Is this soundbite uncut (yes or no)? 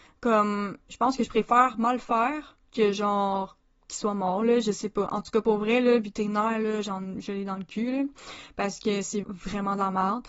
no